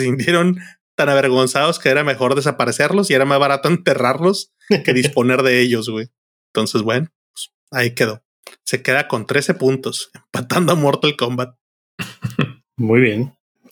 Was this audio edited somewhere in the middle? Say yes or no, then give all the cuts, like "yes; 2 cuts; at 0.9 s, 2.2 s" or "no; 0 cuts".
no; 0 cuts